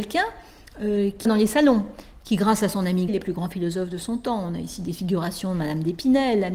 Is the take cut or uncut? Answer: cut